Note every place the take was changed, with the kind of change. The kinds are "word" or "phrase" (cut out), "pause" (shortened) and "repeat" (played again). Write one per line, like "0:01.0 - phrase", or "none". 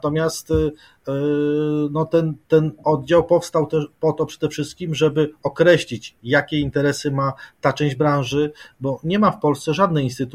none

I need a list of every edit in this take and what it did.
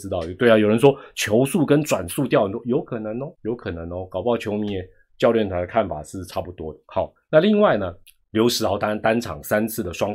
0:03.3 - pause
0:06.8 - pause
0:08.0 - pause

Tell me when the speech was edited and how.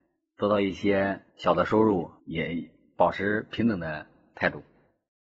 0:01.3 - pause
0:02.2 - pause

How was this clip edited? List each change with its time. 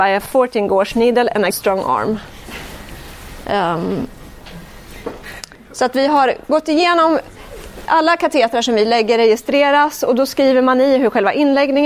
0:01.5 - word

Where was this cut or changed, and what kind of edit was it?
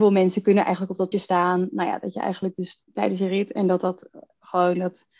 0:01.1 - word
0:02.8 - pause

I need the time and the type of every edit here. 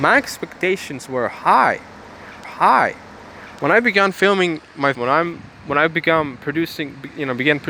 0:02.4 - repeat
0:04.9 - word

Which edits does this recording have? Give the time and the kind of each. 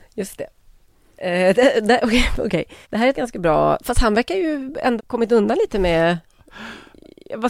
0:02.8 - pause
0:03.1 - word
0:03.8 - word
0:05.0 - word

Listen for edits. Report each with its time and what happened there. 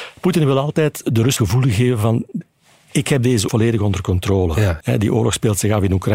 0:01.0 - word
0:01.4 - word
0:03.5 - word
0:04.8 - word

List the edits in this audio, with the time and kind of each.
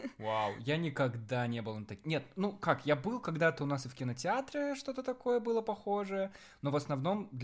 none

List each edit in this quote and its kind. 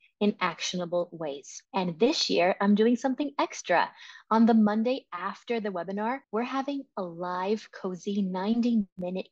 0:01.6 - pause
0:06.2 - pause

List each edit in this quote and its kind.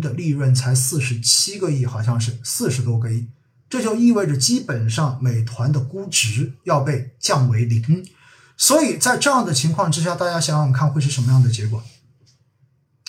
none

